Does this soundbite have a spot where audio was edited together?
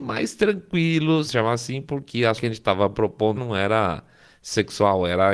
yes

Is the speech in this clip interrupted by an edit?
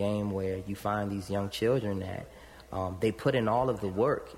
no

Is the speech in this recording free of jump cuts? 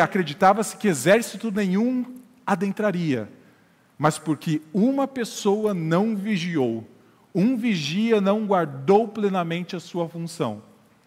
yes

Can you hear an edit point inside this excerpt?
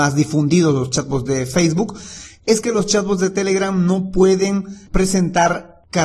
no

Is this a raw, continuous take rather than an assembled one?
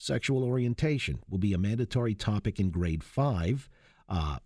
yes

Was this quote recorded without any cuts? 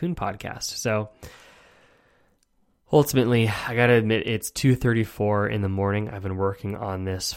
yes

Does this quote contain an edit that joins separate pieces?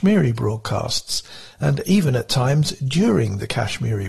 no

